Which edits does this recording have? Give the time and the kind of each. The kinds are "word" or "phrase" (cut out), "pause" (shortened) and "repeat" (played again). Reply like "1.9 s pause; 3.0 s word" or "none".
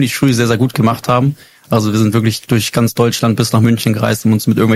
none